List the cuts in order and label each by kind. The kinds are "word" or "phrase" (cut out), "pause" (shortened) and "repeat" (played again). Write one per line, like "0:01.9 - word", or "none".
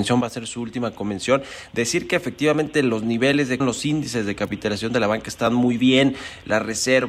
0:03.6 - word

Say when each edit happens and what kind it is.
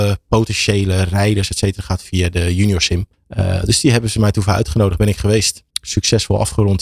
0:03.1 - pause
0:05.7 - pause

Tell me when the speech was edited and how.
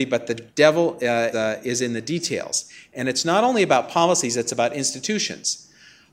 0:01.3 - word

